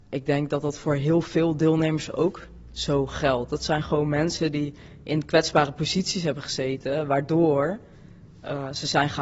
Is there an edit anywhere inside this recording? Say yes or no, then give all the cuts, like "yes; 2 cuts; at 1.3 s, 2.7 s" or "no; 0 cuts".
no; 0 cuts